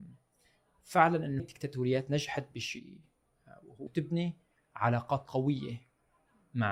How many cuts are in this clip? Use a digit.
2